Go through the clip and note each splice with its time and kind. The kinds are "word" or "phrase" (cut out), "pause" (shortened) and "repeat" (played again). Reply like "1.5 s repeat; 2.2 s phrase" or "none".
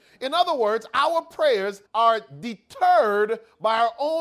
1.8 s pause